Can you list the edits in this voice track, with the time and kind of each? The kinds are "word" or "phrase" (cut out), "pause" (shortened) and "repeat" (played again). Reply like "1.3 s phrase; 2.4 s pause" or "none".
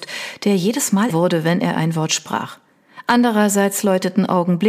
1.1 s word